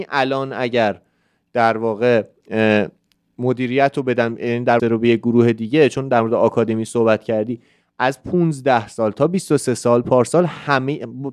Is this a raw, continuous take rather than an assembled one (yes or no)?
no